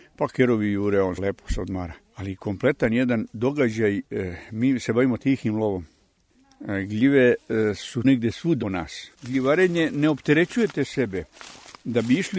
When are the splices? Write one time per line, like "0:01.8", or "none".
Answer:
0:01.2
0:02.0
0:08.0
0:08.6
0:09.1